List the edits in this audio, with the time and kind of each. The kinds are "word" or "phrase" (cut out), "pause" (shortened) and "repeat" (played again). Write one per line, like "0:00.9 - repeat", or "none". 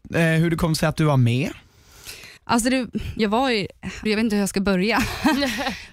0:02.4 - pause
0:03.2 - word
0:04.1 - phrase